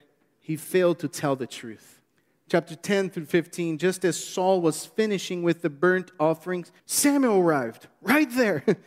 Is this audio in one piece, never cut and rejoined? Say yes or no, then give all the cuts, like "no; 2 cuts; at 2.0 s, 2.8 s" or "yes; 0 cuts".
no; 2 cuts; at 2.1 s, 6.8 s